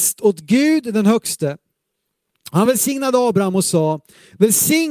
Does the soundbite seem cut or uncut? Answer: uncut